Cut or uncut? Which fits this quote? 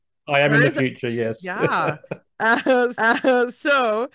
cut